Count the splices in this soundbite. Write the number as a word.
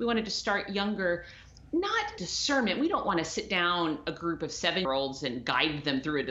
two